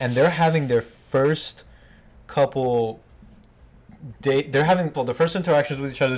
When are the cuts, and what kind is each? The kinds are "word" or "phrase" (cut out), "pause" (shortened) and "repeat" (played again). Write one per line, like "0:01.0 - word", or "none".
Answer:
0:04.9 - word